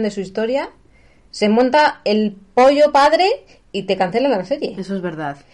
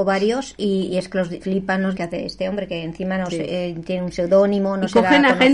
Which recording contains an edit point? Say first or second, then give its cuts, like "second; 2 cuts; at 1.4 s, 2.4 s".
second; 2 cuts; at 1.4 s, 1.9 s